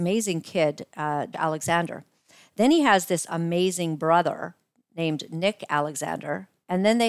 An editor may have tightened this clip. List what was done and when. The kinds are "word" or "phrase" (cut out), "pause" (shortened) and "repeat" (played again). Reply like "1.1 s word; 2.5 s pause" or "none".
1.3 s word